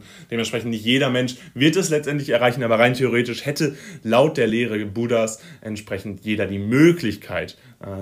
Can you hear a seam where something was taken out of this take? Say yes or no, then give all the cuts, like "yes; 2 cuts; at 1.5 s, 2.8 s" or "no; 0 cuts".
no; 0 cuts